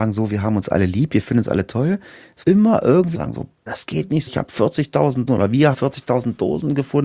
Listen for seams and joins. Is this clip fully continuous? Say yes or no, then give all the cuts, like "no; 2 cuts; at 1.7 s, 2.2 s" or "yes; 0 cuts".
no; 6 cuts; at 2.4 s, 3.1 s, 3.7 s, 4.3 s, 5.3 s, 5.7 s